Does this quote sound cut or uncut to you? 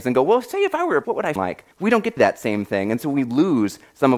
cut